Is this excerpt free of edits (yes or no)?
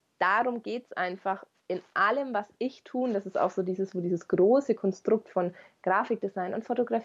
yes